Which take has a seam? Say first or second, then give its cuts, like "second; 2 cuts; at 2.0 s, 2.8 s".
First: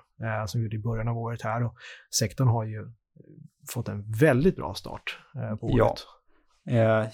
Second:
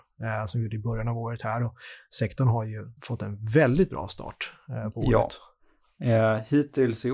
second; 1 cut; at 3.0 s